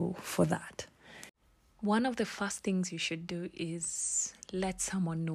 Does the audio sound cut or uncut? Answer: uncut